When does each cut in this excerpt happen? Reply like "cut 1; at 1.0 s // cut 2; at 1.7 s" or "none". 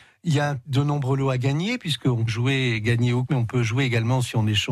cut 1; at 2.3 s // cut 2; at 3.3 s